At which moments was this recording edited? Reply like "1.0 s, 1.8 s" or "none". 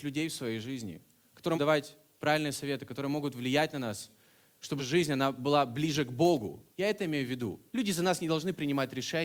1.5 s, 4.8 s, 6.7 s, 7.7 s

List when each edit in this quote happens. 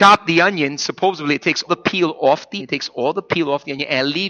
1.7 s, 2.6 s

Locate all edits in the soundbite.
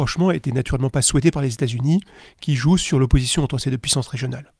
none

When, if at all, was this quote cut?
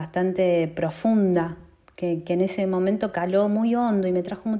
none

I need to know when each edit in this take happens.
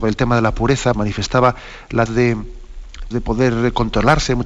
0.9 s, 2.1 s, 3.1 s

